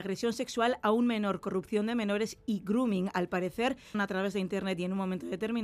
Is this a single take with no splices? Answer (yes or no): no